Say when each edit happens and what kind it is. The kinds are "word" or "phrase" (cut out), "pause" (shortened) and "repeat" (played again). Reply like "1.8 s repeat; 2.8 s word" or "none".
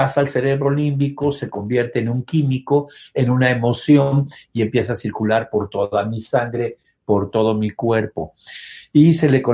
none